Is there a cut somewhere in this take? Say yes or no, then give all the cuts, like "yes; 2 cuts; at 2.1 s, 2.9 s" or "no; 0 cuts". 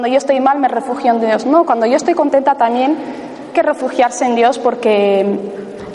yes; 1 cut; at 3.5 s